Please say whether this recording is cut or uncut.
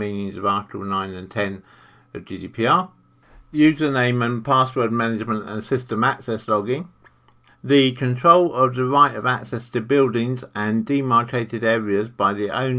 uncut